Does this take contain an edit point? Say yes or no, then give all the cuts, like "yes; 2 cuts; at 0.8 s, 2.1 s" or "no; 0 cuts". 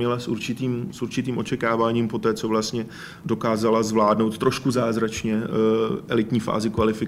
no; 0 cuts